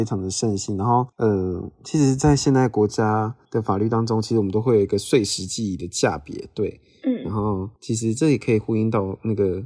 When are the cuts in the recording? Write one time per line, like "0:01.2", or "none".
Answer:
0:01.1
0:03.4
0:07.8